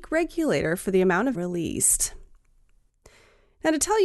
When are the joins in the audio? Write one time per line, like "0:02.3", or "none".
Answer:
0:01.3

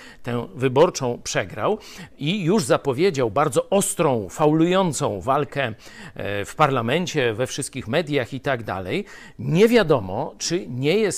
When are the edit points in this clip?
none

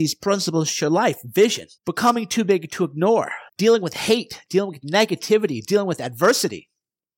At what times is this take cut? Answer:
0:01.8
0:03.5

